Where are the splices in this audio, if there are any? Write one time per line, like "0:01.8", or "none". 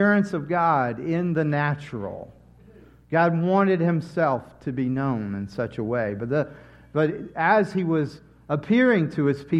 none